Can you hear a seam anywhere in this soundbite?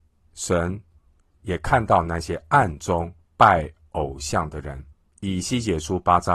yes; 2 cuts; at 3.2 s, 4.9 s

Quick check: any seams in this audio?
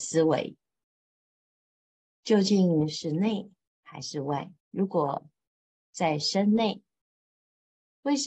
yes; 1 cut; at 4.6 s

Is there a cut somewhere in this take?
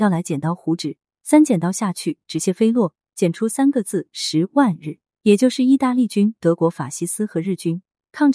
yes; 1 cut; at 5.1 s

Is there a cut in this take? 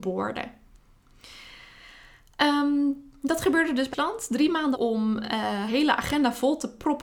yes; 3 cuts; at 3.9 s, 4.7 s, 5.7 s

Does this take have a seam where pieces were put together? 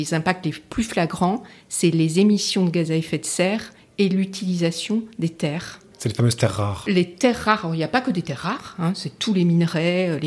no; 0 cuts

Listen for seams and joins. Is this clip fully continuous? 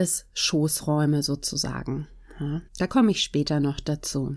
no; 1 cut; at 2.7 s

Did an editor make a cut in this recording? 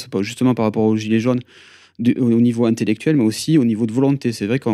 no; 0 cuts

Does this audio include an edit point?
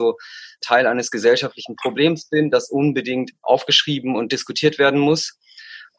yes; 1 cut; at 3.3 s

